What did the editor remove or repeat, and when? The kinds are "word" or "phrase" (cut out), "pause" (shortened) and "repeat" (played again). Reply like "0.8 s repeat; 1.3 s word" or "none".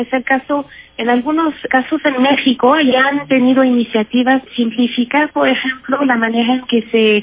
1.7 s word; 2.9 s phrase; 4.5 s word